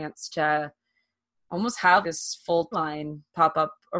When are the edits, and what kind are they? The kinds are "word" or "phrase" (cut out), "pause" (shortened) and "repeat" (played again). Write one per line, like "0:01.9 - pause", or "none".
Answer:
0:02.0 - word
0:02.7 - word